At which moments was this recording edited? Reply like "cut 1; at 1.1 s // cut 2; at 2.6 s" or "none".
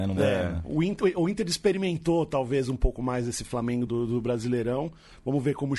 cut 1; at 3.9 s